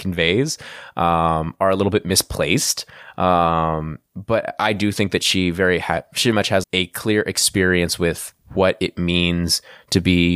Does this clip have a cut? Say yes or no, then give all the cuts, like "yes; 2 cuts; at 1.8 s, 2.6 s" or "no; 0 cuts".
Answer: yes; 2 cuts; at 6.3 s, 6.6 s